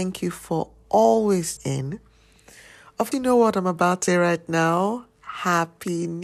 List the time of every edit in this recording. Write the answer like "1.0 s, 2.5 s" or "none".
1.6 s, 3.1 s, 4.1 s